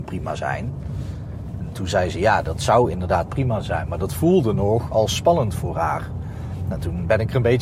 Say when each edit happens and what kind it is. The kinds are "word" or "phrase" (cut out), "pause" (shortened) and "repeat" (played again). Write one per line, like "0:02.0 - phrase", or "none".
none

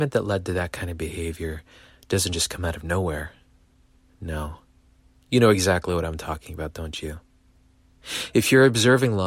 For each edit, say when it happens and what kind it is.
none

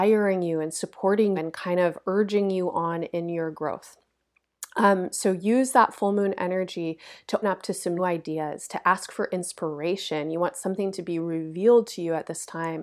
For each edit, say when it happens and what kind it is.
0:01.4 - word
0:07.4 - word
0:08.0 - word

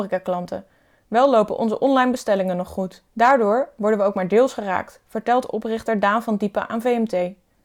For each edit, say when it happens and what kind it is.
0:03.1 - pause

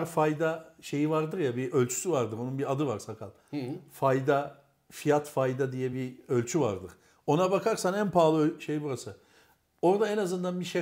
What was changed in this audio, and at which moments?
none

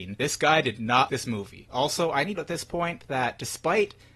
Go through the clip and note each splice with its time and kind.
0:01.1 - word
0:02.4 - phrase

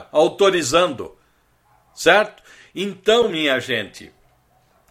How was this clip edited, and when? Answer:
none

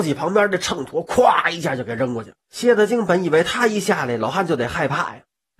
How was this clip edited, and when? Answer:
0:02.4 - pause

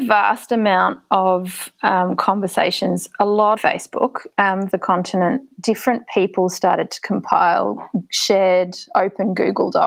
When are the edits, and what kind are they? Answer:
0:03.6 - phrase
0:04.7 - phrase

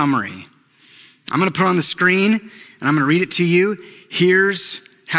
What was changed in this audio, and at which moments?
none

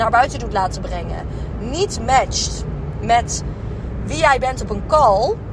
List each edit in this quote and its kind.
none

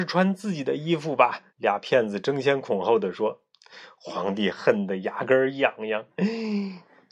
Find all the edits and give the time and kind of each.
0:01.5 - pause

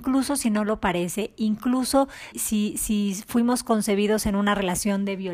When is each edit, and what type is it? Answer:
0:02.3 - word

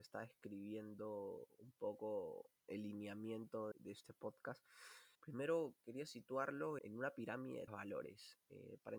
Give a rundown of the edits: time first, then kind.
0:02.6 - pause
0:03.7 - word
0:05.2 - pause
0:06.8 - word
0:07.7 - word

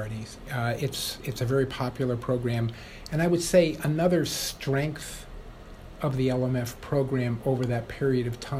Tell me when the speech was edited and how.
none

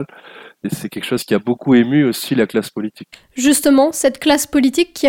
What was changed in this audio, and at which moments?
none

